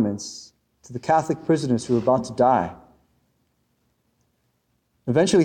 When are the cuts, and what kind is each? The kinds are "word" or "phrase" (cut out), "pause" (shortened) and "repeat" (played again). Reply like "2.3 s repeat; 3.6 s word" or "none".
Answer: none